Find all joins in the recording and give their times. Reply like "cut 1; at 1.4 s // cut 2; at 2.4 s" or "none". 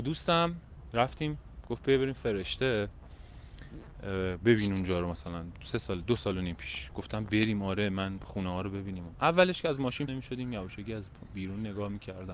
cut 1; at 10.1 s